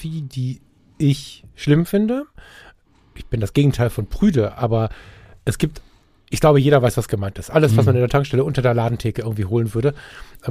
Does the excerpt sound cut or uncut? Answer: uncut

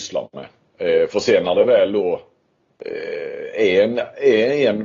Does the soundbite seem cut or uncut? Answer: uncut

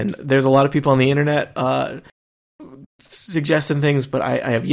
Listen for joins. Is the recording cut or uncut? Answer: cut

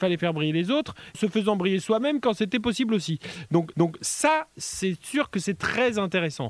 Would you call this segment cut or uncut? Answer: cut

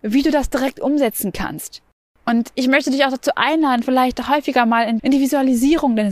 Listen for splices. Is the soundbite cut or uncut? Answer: cut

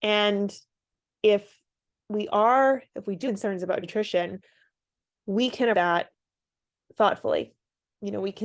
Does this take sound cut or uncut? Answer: cut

